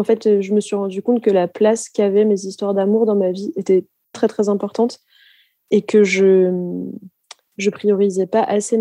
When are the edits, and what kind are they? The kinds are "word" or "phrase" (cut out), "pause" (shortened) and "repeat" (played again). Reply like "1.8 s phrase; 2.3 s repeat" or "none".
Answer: 4.1 s word